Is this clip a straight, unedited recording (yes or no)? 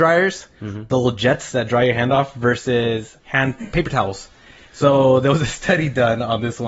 no